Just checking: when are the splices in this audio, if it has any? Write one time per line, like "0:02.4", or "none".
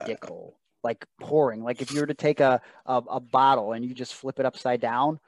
none